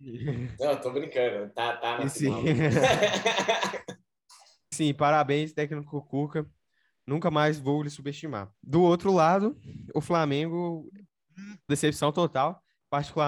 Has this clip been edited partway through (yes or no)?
yes